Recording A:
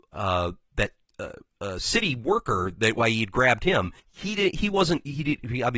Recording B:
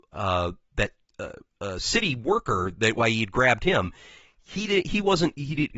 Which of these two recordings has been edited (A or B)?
A